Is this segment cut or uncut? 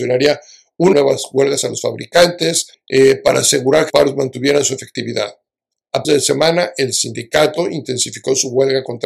cut